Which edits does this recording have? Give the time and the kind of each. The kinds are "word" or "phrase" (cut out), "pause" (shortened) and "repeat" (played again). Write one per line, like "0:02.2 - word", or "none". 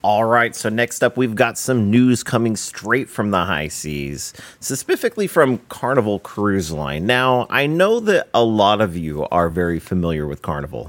none